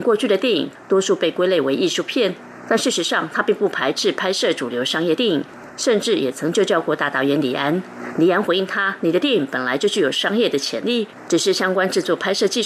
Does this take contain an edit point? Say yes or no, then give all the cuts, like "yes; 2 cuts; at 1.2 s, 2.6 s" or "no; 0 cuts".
no; 0 cuts